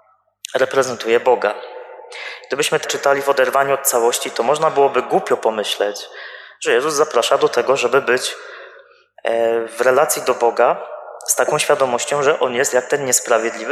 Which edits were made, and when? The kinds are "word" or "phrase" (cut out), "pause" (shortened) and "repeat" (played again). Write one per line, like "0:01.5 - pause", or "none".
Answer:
0:02.8 - word